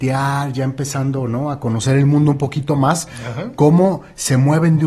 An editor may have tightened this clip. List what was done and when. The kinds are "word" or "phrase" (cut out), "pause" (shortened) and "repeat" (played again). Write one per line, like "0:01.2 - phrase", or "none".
none